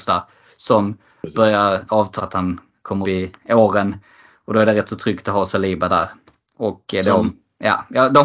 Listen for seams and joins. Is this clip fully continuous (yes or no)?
no